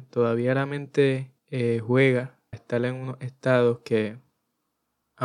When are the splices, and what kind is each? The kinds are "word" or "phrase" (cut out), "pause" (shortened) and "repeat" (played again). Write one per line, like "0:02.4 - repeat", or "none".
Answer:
0:01.4 - pause
0:02.5 - word